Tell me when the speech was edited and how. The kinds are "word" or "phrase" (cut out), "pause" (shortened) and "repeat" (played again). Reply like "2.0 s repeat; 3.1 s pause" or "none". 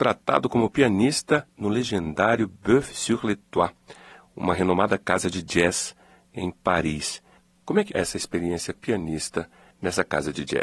7.9 s word; 8.7 s word

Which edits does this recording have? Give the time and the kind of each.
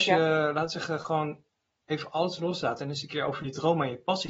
none

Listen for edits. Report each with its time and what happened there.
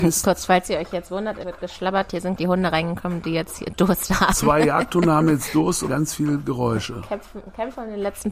1.4 s word; 2.4 s word; 5.9 s word

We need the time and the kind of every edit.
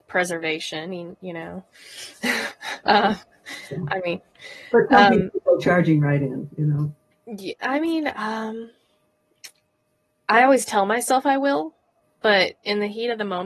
none

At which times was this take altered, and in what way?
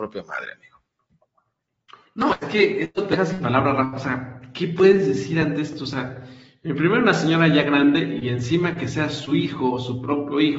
none

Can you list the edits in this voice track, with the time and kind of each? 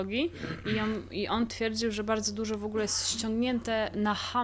1.5 s word

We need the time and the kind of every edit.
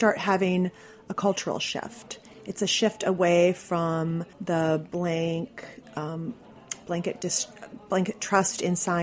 4.3 s pause

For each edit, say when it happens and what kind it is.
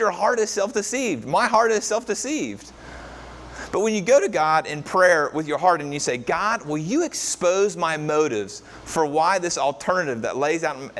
none

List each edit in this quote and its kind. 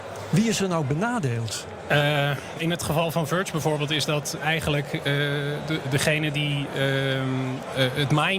2.6 s word; 4.4 s word

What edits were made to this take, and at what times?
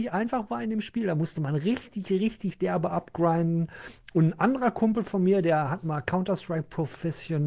none

